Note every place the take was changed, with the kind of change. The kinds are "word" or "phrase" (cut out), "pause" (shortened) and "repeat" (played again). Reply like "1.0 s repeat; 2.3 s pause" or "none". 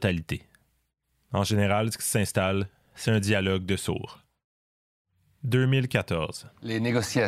none